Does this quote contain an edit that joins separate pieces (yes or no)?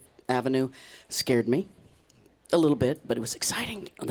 no